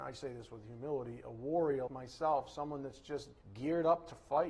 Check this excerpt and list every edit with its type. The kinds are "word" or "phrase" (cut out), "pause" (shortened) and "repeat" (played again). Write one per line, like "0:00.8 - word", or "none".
0:01.9 - word
0:03.4 - pause